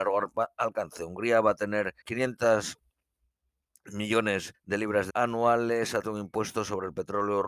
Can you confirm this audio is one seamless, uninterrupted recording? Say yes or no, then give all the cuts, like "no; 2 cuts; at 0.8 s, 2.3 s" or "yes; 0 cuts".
no; 4 cuts; at 2.0 s, 4.5 s, 5.1 s, 6.0 s